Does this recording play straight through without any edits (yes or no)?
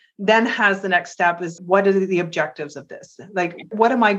no